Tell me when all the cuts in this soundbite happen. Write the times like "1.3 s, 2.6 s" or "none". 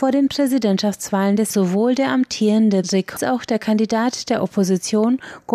1.5 s, 2.8 s, 3.2 s